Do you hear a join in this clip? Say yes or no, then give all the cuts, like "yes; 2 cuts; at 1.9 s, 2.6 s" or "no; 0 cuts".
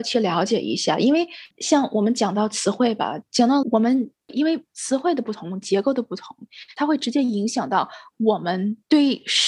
yes; 1 cut; at 3.6 s